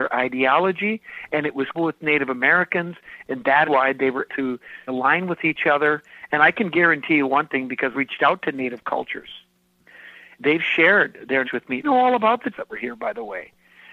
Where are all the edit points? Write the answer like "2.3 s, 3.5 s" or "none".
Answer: 1.7 s, 3.6 s, 4.3 s, 4.9 s, 7.9 s, 10.4 s, 11.4 s, 11.8 s, 12.5 s